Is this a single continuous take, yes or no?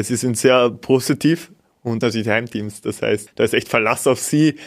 no